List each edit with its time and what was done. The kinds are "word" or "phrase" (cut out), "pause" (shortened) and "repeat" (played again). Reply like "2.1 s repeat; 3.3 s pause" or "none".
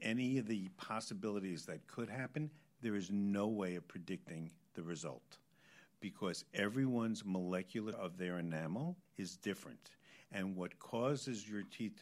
7.9 s word; 9.1 s pause